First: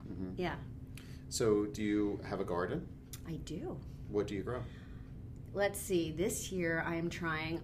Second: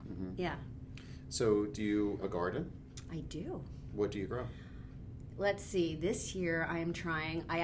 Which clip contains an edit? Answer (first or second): second